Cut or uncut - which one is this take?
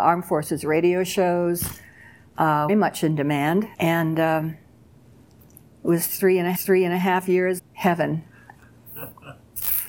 cut